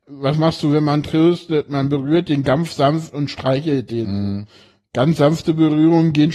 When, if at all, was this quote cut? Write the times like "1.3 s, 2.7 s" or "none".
none